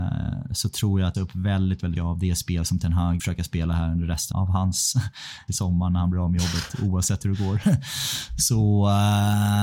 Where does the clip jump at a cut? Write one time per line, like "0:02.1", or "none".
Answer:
0:01.1
0:02.0
0:03.2
0:04.3
0:05.5